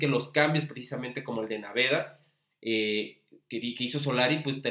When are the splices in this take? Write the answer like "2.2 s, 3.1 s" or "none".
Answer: none